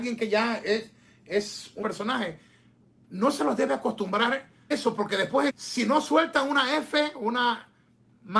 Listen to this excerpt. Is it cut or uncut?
cut